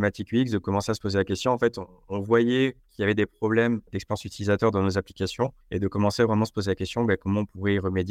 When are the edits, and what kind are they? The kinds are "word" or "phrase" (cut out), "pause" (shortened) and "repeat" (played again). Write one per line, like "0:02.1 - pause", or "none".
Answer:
0:03.9 - pause
0:05.6 - pause